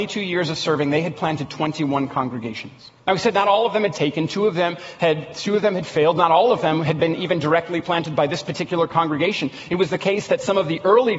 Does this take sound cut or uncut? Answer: uncut